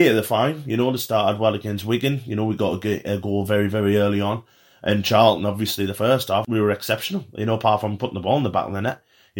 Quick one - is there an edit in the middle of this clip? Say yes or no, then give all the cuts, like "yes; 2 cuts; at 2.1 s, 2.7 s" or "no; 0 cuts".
no; 0 cuts